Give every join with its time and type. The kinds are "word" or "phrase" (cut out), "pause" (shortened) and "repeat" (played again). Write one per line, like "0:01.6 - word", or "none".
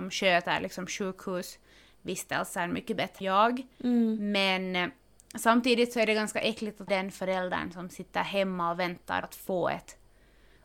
0:03.2 - word
0:06.9 - word
0:09.2 - word